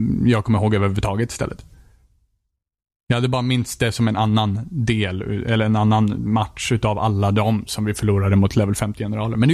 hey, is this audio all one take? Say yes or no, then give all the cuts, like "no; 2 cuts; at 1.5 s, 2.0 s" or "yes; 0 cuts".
yes; 0 cuts